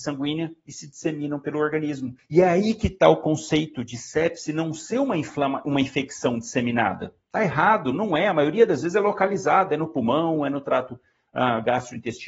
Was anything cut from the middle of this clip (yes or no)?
no